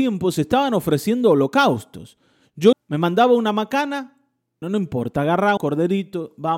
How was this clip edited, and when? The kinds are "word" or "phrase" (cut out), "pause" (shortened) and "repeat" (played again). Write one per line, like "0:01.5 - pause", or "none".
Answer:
0:02.7 - word
0:04.6 - word
0:05.6 - word